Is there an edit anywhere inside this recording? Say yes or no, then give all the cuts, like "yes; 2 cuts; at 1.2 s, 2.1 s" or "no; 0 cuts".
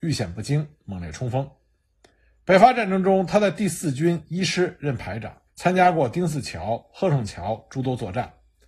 yes; 1 cut; at 5.5 s